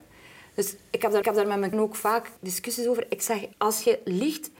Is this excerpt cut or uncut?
cut